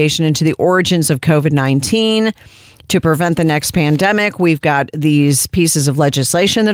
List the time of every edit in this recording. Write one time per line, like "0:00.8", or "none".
none

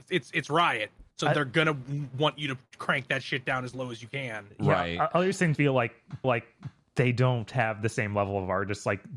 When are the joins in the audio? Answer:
0:01.1
0:05.5
0:06.2

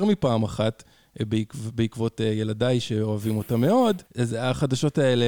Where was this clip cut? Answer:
0:04.1

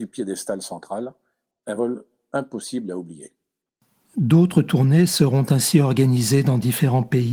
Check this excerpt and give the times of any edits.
none

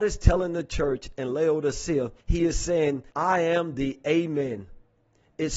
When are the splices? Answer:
0:02.2
0:03.1

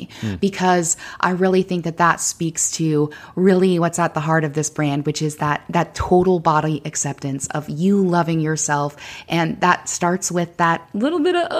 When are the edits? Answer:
none

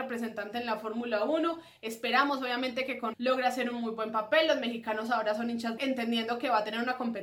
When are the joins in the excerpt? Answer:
0:03.1
0:05.8

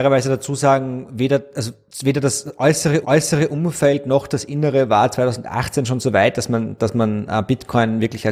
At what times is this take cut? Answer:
0:03.0

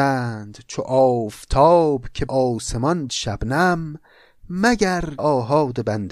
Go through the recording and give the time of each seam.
0:02.3
0:03.1
0:05.2

